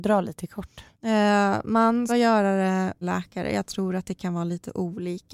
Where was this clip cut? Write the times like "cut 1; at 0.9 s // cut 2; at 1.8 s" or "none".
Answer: cut 1; at 0.9 s // cut 2; at 2.1 s // cut 3; at 3.0 s